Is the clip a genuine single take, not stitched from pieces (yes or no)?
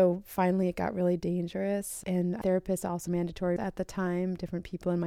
no